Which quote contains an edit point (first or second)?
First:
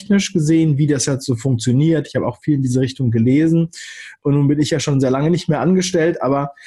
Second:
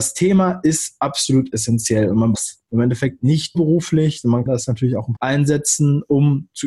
second